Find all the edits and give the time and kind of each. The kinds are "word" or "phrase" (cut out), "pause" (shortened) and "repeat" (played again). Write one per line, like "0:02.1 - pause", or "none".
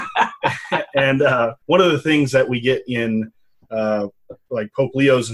0:01.6 - pause

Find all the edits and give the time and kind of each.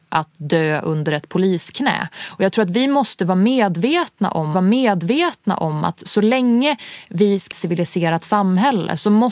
0:04.5 - repeat
0:07.5 - phrase

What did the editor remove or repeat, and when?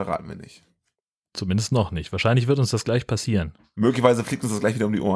none

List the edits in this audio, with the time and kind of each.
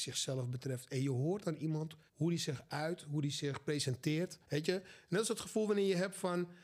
0:02.1 - pause
0:04.4 - pause

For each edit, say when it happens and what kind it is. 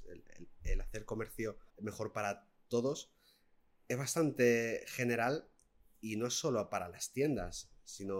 0:01.7 - pause

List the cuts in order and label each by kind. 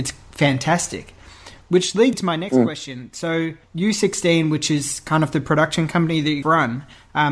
0:02.1 - word
0:03.6 - pause
0:06.4 - word

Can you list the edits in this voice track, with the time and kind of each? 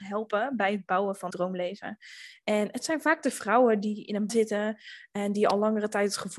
0:01.3 - word
0:04.3 - word

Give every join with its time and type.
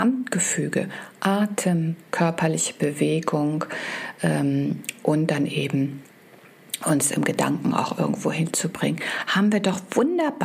none

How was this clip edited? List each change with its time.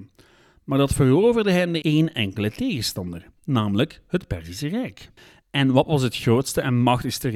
0:01.8 - phrase
0:03.4 - pause
0:05.2 - pause

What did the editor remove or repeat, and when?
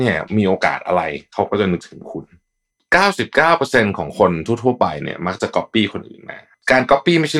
none

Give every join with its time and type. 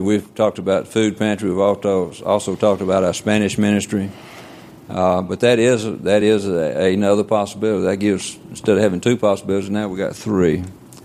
none

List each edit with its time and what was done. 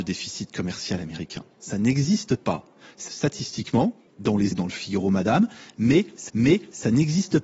0:01.5 - pause
0:03.1 - word
0:04.1 - pause
0:04.5 - word
0:06.3 - repeat

